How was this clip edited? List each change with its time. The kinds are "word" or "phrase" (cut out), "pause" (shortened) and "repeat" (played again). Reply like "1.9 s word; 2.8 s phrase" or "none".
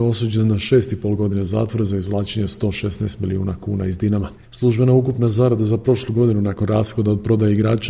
4.4 s pause